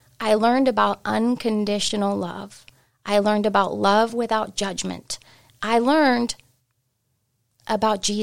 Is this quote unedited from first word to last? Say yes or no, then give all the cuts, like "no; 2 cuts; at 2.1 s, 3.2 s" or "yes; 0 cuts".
yes; 0 cuts